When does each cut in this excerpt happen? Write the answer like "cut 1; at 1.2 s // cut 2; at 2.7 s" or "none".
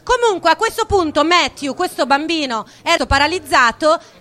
cut 1; at 3.0 s